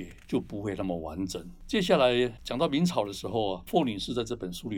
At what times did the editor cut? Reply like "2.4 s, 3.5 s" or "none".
2.4 s